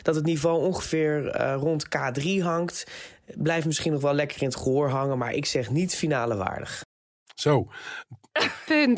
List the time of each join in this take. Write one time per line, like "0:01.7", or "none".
none